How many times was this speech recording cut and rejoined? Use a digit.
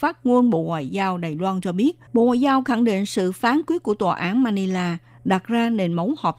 1